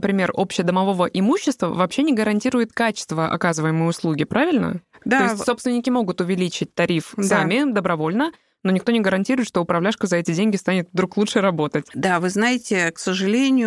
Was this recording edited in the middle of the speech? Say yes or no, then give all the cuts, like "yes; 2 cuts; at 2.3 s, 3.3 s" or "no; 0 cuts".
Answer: no; 0 cuts